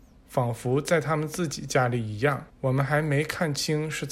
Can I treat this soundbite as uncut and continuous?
no; 1 cut; at 2.5 s

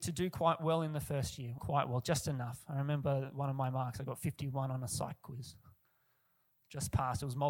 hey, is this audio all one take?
no; 1 cut; at 1.6 s

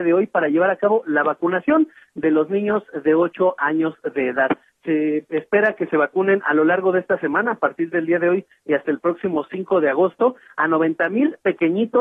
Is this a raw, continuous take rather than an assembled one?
yes; 0 cuts

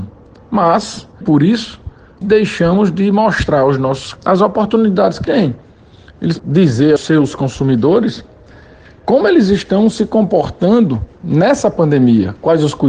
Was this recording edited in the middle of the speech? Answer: yes; 6 cuts; at 1.2 s, 2.2 s, 4.2 s, 5.2 s, 6.4 s, 7.0 s

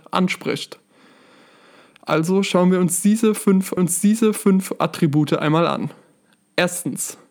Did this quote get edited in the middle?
yes; 1 cut; at 3.8 s

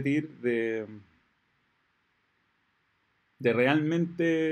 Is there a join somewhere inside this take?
no; 0 cuts

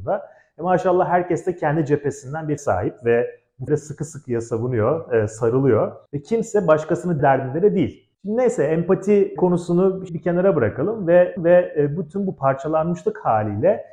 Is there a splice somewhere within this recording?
yes; 8 cuts; at 2.6 s, 3.7 s, 6.1 s, 7.2 s, 8.1 s, 9.4 s, 10.1 s, 11.4 s

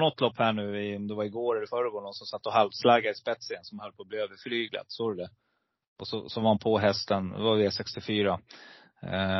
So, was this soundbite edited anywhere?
no; 0 cuts

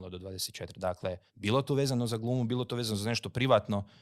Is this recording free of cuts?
no; 1 cut; at 1.3 s

